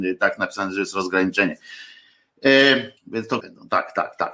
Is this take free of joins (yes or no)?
no